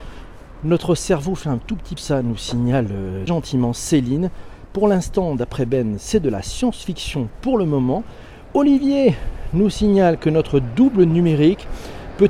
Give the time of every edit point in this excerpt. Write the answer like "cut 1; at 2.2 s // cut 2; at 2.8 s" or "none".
cut 1; at 1.4 s // cut 2; at 2.0 s // cut 3; at 3.3 s

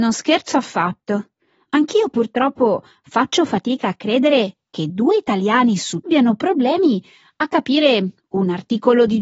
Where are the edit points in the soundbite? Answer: cut 1; at 6.1 s

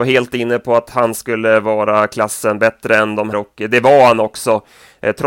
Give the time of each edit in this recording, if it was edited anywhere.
cut 1; at 3.3 s

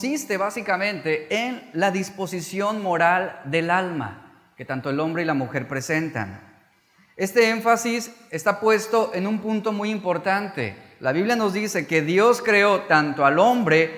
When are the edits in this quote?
none

